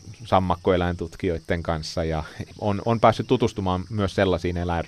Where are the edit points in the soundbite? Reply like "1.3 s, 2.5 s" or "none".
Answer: none